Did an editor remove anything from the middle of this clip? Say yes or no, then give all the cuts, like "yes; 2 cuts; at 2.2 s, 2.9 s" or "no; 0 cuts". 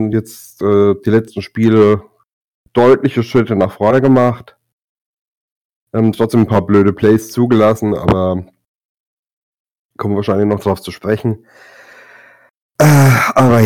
no; 0 cuts